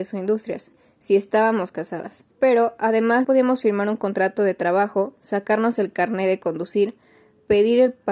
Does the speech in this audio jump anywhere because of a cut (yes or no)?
yes